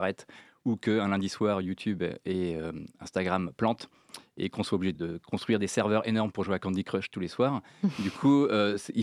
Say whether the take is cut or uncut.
cut